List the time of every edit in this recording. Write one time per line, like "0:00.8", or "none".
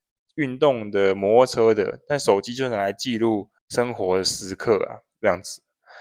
0:03.6